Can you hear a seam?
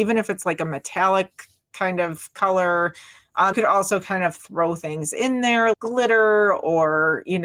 yes; 2 cuts; at 3.5 s, 5.7 s

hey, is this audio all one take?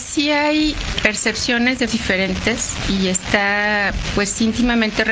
no; 2 cuts; at 0.9 s, 1.9 s

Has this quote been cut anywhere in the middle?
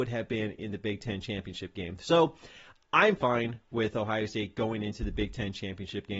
yes; 1 cut; at 3.2 s

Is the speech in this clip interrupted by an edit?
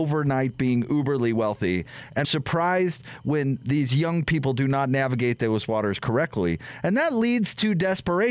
yes; 1 cut; at 2.2 s

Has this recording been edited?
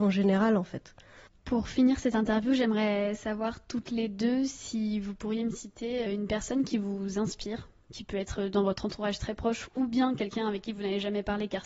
yes; 1 cut; at 6.1 s

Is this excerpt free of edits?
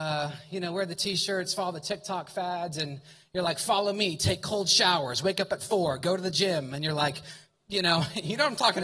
yes; 0 cuts

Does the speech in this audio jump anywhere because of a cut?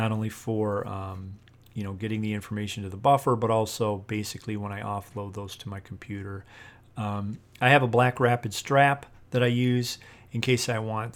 no; 0 cuts

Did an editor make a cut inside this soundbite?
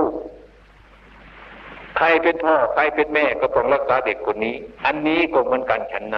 yes; 1 cut; at 4.8 s

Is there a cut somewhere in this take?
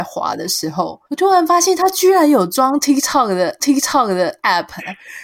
yes; 2 cuts; at 1.0 s, 3.6 s

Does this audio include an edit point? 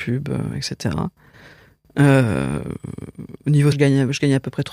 yes; 1 cut; at 3.7 s

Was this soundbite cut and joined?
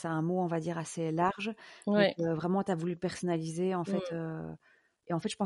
no; 0 cuts

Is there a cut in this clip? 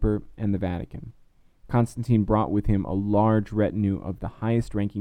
no; 0 cuts

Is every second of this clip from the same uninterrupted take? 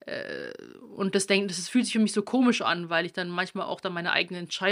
yes; 0 cuts

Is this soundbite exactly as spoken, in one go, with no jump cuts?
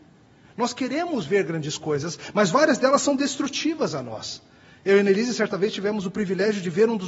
yes; 0 cuts

